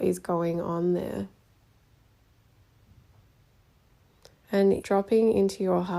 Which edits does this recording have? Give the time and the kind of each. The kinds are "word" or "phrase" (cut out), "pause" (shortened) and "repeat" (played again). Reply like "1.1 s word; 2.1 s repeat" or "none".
4.8 s word